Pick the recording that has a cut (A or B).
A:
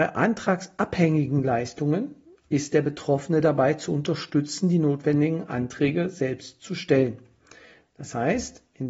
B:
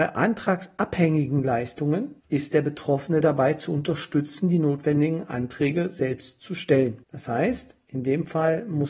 B